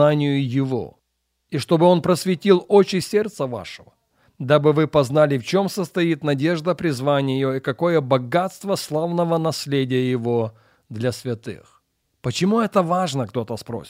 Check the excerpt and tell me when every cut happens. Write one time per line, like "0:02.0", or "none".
none